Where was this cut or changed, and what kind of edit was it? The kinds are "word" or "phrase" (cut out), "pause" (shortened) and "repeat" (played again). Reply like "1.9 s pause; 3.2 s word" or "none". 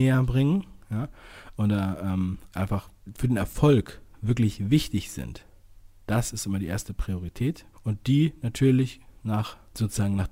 7.7 s pause